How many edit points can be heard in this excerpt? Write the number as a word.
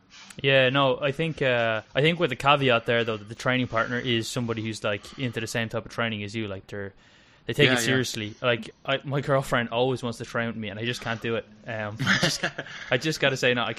three